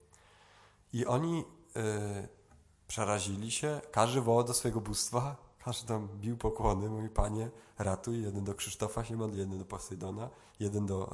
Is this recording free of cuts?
yes; 0 cuts

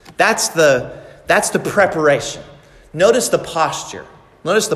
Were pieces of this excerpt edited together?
no; 0 cuts

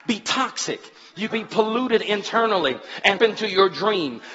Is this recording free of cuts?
no; 2 cuts; at 1.3 s, 3.2 s

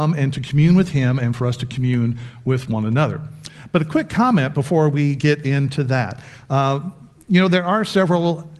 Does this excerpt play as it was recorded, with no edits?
yes; 0 cuts

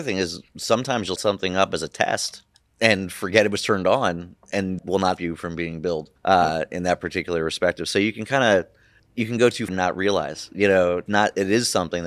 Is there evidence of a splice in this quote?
yes; 8 cuts; at 1.2 s, 2.5 s, 4.8 s, 5.2 s, 6.2 s, 9.0 s, 9.7 s, 11.1 s

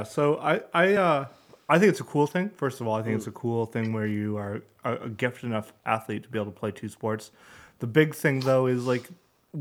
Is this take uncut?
yes; 0 cuts

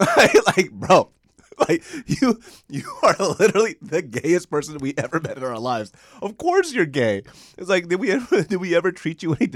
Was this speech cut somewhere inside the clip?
no; 0 cuts

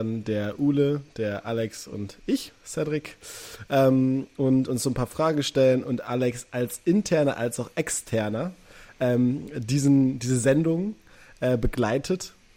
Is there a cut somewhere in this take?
no; 0 cuts

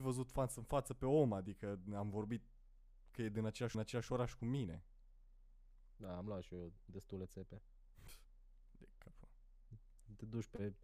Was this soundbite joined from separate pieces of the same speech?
yes; 1 cut; at 3.7 s

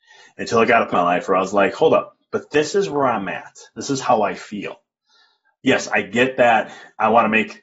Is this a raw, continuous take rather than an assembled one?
no; 1 cut; at 0.9 s

